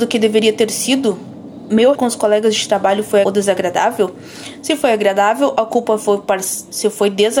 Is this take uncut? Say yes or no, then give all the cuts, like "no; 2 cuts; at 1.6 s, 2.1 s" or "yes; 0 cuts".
no; 2 cuts; at 1.9 s, 3.2 s